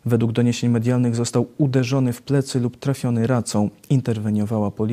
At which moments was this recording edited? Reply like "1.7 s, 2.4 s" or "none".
none